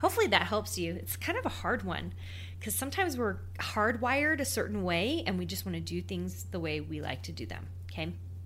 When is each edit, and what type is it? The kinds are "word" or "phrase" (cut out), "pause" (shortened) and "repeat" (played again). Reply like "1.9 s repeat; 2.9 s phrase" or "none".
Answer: none